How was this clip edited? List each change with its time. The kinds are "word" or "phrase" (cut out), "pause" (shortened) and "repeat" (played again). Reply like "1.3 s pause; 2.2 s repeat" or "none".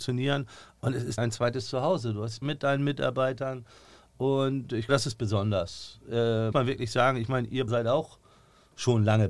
1.2 s word; 2.4 s word; 4.9 s word; 6.5 s word; 7.7 s word